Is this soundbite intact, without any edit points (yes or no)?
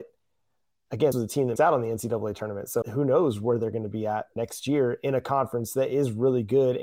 no